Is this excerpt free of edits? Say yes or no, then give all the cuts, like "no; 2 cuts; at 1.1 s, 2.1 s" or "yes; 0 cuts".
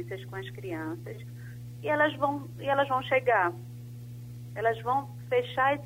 yes; 0 cuts